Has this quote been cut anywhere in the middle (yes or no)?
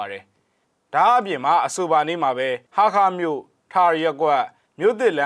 yes